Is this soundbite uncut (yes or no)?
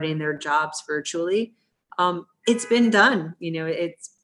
yes